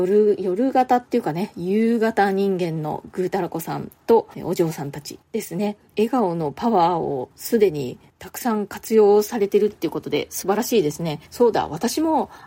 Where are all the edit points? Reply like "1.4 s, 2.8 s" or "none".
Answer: 4.3 s, 5.2 s, 5.9 s, 7.3 s, 11.3 s

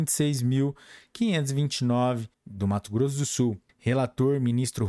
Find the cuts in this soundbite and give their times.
2.3 s, 3.7 s

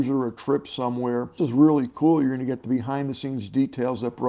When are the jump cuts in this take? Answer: 1.4 s

